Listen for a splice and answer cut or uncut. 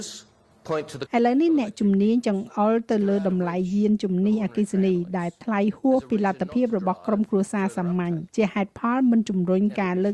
cut